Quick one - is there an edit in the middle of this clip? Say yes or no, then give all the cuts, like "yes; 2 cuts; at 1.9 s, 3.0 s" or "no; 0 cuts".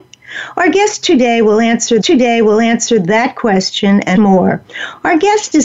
yes; 2 cuts; at 2.0 s, 4.2 s